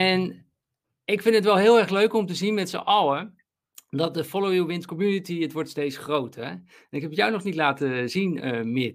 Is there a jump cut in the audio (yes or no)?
no